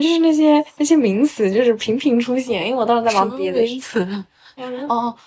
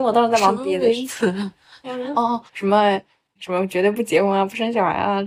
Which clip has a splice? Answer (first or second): second